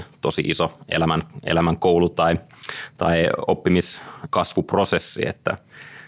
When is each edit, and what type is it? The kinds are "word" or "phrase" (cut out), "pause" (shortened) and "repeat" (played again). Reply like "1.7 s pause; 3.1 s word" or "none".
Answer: none